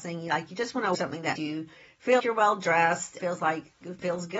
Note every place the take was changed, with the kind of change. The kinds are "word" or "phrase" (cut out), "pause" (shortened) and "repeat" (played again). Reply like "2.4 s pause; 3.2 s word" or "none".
0.9 s word; 1.4 s word; 2.2 s word; 3.2 s word